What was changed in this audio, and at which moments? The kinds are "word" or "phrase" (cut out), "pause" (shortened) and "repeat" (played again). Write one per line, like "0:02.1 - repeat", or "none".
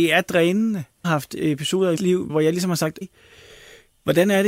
0:01.0 - phrase
0:02.0 - word
0:02.3 - word
0:03.0 - word